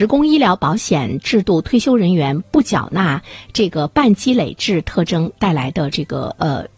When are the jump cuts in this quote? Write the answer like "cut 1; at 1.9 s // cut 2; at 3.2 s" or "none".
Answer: none